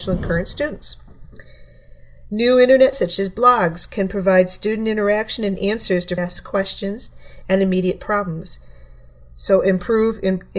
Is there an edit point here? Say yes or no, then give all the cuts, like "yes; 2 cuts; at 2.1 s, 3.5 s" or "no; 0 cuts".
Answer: yes; 2 cuts; at 2.9 s, 6.2 s